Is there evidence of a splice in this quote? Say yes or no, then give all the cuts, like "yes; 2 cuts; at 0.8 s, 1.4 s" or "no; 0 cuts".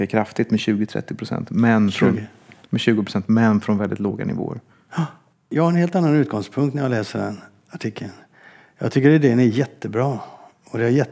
no; 0 cuts